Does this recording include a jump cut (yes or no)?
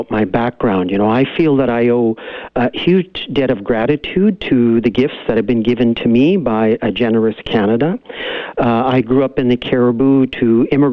no